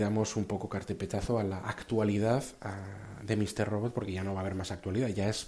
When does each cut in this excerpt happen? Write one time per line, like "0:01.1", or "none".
none